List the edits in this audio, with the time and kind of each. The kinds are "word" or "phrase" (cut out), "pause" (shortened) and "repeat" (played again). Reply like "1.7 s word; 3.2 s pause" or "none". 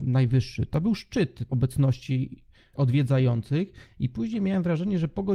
1.5 s word; 2.7 s word